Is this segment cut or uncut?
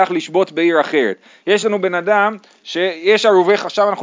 uncut